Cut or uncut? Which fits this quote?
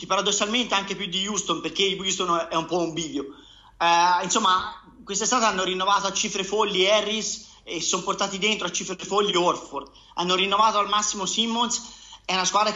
uncut